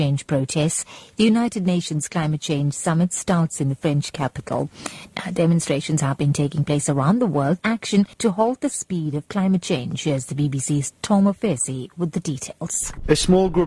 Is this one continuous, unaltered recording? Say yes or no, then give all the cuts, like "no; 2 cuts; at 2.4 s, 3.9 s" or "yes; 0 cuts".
no; 2 cuts; at 7.6 s, 8.1 s